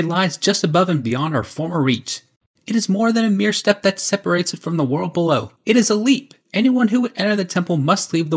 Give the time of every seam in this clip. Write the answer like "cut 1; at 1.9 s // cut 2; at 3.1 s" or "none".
cut 1; at 5.5 s // cut 2; at 6.4 s